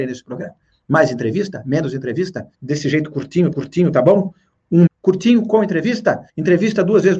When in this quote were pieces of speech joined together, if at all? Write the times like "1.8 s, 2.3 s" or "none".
2.5 s, 3.5 s, 4.9 s, 6.3 s